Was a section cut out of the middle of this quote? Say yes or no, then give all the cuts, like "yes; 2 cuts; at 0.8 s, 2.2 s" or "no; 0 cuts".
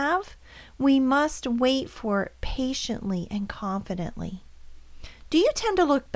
no; 0 cuts